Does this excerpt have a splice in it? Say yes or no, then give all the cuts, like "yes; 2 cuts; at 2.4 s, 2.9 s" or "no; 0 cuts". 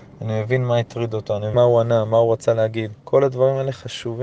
yes; 2 cuts; at 1.5 s, 3.0 s